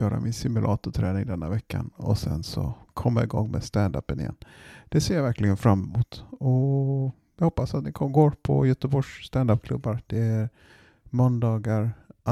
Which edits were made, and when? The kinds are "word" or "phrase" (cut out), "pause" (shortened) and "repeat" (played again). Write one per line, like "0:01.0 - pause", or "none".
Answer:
none

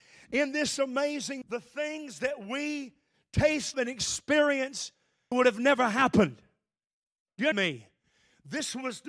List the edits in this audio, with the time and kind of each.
0:01.4 - word
0:03.7 - word
0:05.3 - word
0:07.5 - word

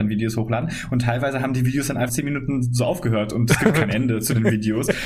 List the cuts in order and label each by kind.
0:02.1 - word

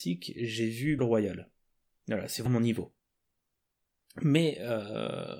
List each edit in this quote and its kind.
0:01.0 - word
0:02.5 - word

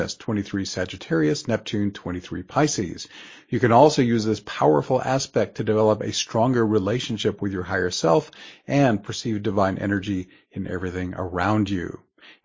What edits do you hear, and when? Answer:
none

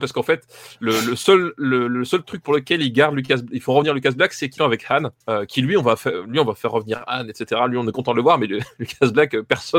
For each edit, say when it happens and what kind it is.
0:04.6 - phrase
0:05.2 - pause

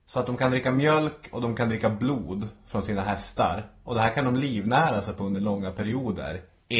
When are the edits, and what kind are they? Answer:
none

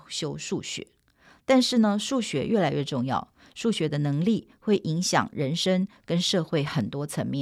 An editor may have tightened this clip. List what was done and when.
none

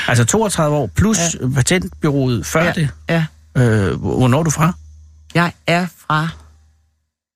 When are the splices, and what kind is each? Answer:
none

